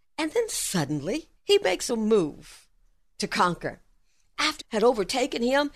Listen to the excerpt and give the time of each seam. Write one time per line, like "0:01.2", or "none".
0:01.4
0:01.9
0:04.6